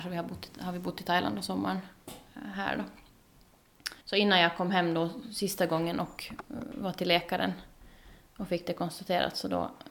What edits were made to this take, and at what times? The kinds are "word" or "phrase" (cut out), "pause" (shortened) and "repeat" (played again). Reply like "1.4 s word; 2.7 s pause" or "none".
4.0 s pause